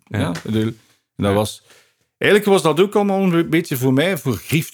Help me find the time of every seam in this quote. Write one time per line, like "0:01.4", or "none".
none

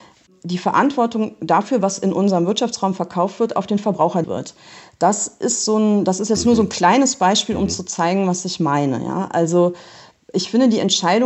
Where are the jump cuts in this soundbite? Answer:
0:04.2

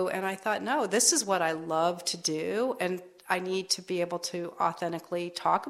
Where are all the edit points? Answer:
none

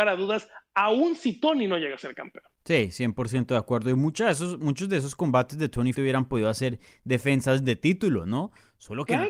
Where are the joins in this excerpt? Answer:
0:02.5
0:05.9

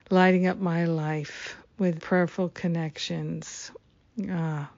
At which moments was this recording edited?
0:02.0

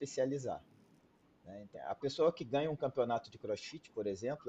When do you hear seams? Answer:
0:01.7

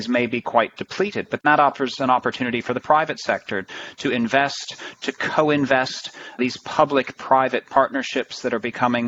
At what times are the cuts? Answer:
none

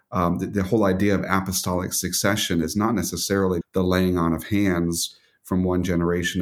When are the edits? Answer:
0:03.6

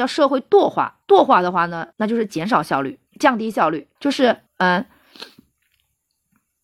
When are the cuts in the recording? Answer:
0:01.0
0:01.9
0:03.1
0:04.0
0:04.5

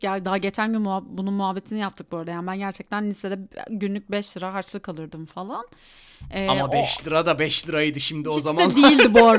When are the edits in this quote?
none

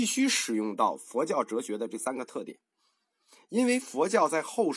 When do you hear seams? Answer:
none

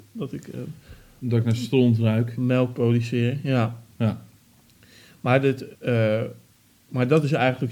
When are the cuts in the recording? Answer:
0:05.7

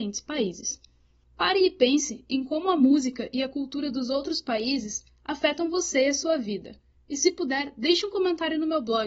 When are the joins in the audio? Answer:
none

